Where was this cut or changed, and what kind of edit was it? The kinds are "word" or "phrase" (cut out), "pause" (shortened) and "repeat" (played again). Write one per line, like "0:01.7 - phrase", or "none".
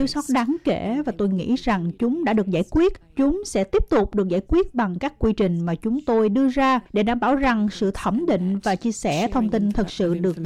0:03.0 - pause
0:06.9 - pause